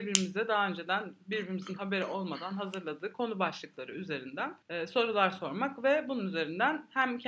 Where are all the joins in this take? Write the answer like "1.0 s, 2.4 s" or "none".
4.6 s